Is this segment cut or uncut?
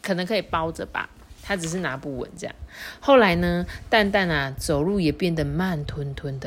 cut